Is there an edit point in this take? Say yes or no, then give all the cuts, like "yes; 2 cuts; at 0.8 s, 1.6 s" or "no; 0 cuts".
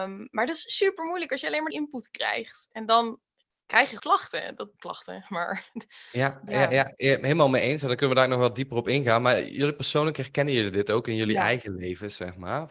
yes; 4 cuts; at 1.7 s, 4.0 s, 4.8 s, 6.5 s